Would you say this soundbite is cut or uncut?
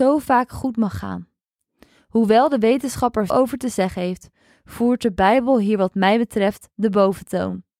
cut